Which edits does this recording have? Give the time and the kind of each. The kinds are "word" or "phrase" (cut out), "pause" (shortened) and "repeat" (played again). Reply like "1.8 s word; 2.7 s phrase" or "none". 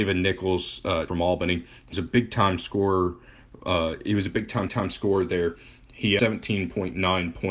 1.1 s word; 1.9 s word; 4.7 s repeat; 6.2 s word